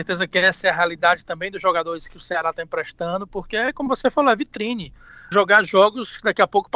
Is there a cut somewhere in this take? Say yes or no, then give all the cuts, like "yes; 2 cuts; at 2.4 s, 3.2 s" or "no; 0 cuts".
yes; 1 cut; at 5.3 s